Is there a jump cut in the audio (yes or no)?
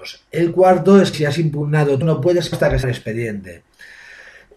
yes